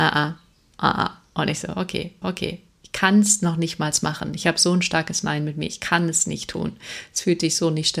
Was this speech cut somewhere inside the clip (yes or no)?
yes